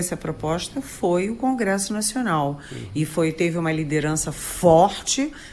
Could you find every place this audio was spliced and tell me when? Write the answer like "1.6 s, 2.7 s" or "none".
none